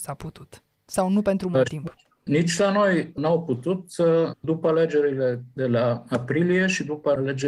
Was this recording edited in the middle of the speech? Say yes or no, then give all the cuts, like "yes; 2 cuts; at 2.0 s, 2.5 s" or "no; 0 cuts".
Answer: no; 0 cuts